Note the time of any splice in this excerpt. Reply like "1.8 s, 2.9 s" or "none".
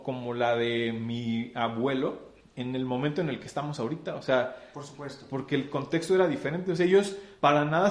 none